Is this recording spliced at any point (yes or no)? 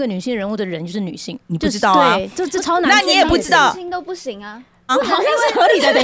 yes